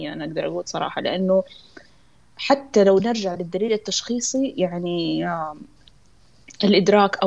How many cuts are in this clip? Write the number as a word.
zero